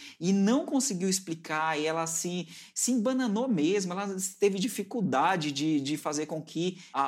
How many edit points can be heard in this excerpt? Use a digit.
0